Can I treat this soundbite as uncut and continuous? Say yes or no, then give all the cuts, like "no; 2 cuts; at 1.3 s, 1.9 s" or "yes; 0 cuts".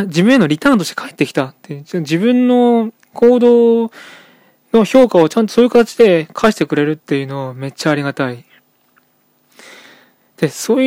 yes; 0 cuts